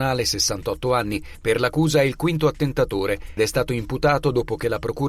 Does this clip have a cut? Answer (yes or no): yes